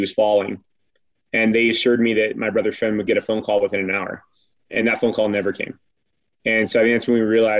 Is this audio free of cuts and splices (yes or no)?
yes